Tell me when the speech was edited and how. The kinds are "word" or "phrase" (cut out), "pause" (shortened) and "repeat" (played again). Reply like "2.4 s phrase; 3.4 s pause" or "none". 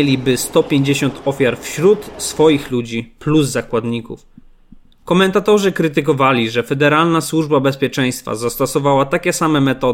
none

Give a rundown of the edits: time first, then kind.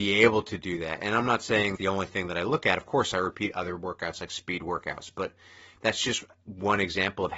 1.8 s phrase

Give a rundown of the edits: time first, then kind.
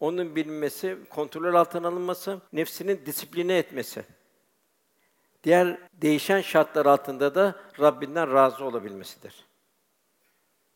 1.0 s word; 2.5 s pause; 5.9 s pause; 7.7 s pause

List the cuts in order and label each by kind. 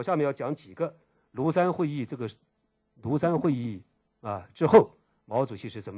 none

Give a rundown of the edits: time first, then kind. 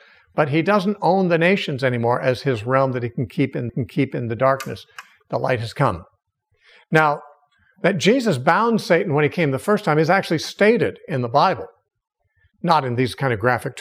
3.7 s repeat

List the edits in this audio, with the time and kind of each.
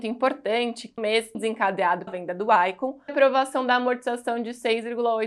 1.0 s phrase; 1.3 s phrase; 2.1 s word; 3.1 s phrase

